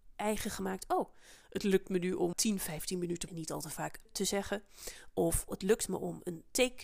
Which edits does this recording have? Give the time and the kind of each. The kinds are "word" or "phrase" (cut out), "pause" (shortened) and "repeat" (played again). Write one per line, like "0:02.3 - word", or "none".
0:02.3 - word
0:03.3 - phrase
0:04.1 - word
0:05.5 - word